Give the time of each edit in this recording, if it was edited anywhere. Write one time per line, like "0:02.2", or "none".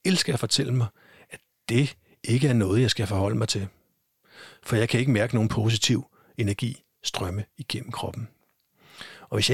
none